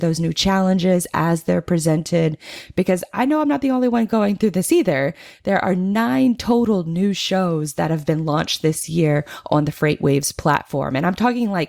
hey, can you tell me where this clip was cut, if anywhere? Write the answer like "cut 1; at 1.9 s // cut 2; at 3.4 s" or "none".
none